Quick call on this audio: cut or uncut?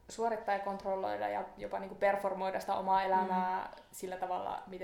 uncut